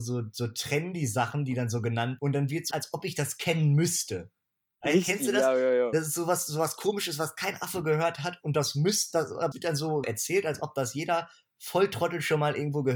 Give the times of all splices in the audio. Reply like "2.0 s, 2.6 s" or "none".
2.2 s, 2.7 s, 9.5 s, 10.0 s